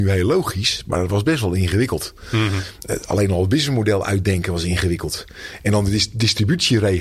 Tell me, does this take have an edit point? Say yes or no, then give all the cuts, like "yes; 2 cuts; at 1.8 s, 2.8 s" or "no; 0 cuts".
no; 0 cuts